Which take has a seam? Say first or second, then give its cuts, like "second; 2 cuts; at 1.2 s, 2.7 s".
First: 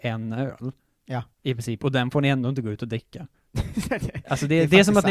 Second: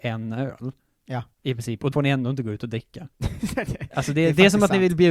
second; 2 cuts; at 1.9 s, 3.1 s